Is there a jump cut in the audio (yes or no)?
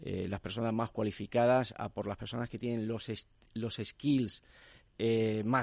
no